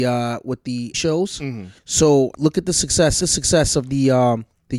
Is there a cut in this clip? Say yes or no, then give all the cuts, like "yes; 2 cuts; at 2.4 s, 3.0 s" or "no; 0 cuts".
yes; 4 cuts; at 0.9 s, 1.8 s, 2.3 s, 3.2 s